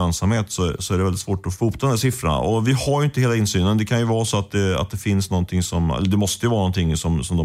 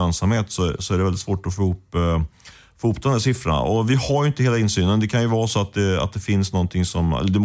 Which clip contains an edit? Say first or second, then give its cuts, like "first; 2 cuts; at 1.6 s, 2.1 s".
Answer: first; 1 cut; at 1.6 s